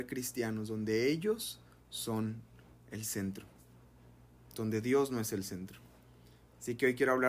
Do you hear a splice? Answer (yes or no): no